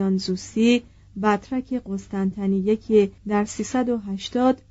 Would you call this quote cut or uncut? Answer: cut